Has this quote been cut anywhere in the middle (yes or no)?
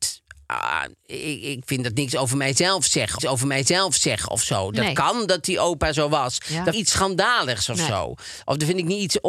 yes